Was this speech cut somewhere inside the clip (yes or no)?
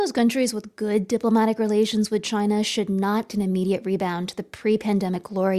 yes